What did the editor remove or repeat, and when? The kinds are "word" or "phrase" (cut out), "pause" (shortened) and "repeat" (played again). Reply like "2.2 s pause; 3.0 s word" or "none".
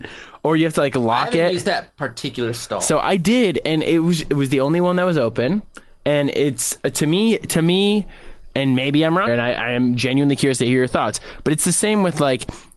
9.3 s word

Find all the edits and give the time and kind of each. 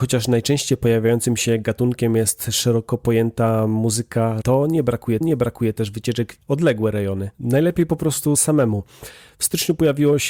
4.4 s word; 5.2 s repeat; 6.4 s phrase; 7.3 s pause; 8.4 s word

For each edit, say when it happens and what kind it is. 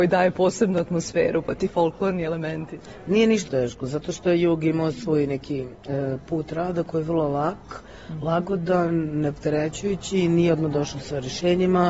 3.5 s word

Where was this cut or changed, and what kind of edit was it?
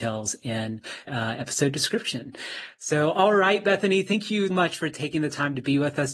1.1 s word; 4.5 s word

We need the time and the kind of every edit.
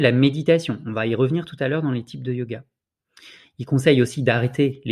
none

